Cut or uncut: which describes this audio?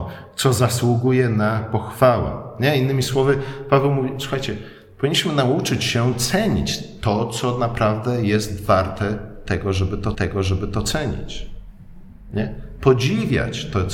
cut